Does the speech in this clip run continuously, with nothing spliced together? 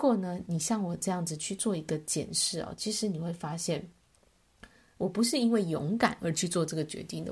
yes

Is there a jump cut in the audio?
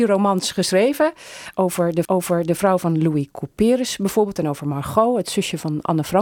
yes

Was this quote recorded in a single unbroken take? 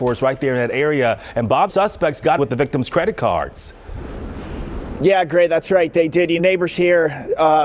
no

